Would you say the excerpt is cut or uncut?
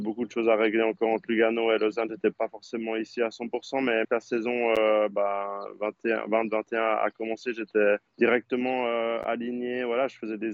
cut